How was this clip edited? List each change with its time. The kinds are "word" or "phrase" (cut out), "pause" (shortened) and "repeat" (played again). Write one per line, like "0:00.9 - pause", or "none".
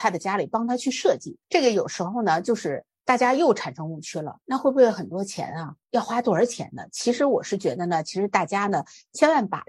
0:01.4 - pause